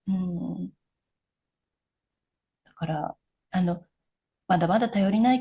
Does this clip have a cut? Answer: yes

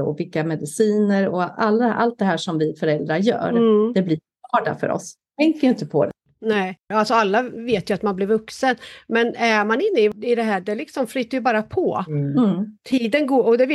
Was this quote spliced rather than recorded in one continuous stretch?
no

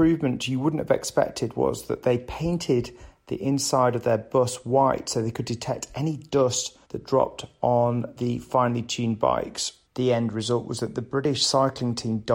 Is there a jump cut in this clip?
yes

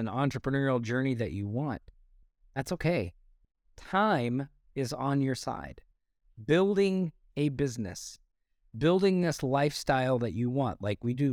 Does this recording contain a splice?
no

